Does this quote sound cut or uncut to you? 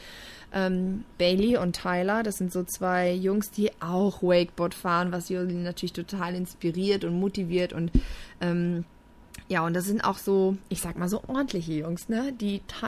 uncut